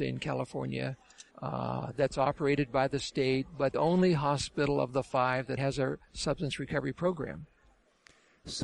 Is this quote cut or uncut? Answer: cut